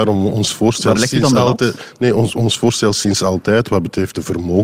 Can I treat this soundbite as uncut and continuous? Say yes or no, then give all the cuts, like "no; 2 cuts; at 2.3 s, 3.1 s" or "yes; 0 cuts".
yes; 0 cuts